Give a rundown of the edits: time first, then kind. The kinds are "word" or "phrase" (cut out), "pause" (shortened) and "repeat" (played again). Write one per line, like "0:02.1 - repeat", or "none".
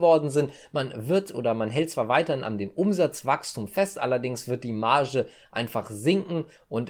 none